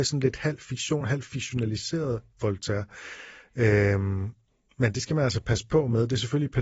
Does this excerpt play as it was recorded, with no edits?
yes; 0 cuts

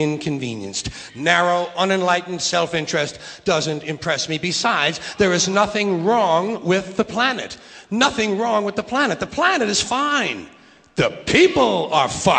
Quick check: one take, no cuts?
yes; 0 cuts

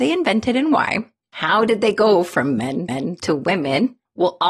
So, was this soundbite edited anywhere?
yes; 1 cut; at 2.9 s

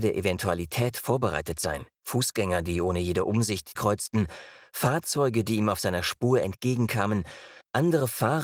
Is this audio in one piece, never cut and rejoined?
no; 2 cuts; at 1.9 s, 3.8 s

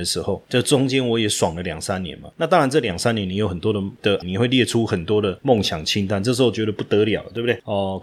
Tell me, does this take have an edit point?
yes; 1 cut; at 4.2 s

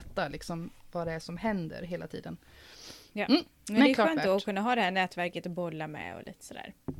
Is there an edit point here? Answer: no; 0 cuts

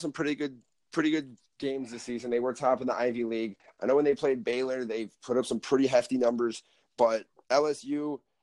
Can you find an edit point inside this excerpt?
no; 0 cuts

